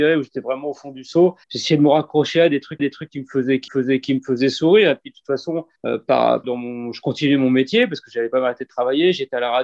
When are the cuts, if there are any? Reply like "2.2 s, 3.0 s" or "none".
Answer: 1.4 s, 2.8 s, 3.7 s, 5.8 s, 6.4 s

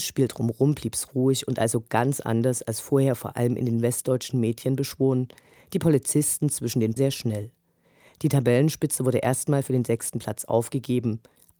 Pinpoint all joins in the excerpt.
7.0 s

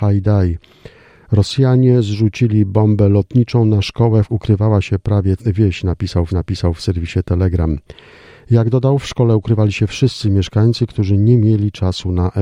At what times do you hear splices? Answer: 4.3 s, 5.4 s, 6.3 s

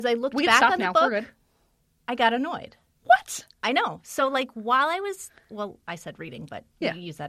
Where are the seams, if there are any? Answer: none

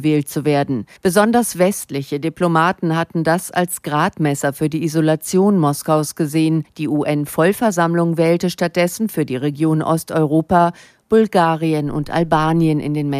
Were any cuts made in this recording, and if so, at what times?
1.0 s

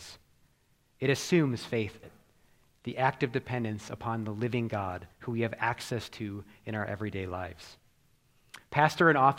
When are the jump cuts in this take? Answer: 2.0 s, 5.1 s

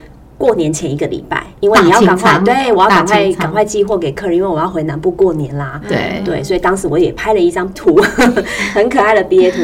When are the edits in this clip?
1.6 s, 7.7 s

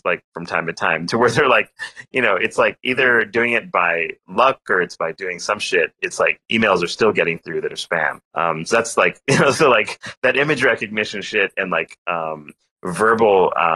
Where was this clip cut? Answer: 8.2 s

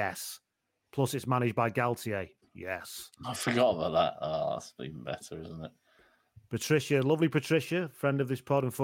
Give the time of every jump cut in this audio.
none

